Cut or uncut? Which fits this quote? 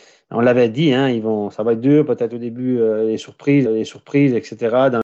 cut